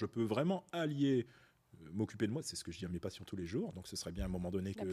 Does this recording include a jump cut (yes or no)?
no